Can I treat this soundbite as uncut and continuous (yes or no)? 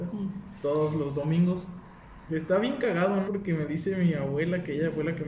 no